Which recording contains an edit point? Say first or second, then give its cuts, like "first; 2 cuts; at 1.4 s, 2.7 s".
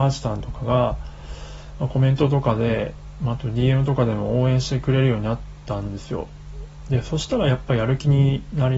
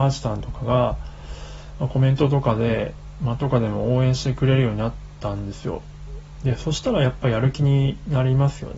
second; 1 cut; at 3.4 s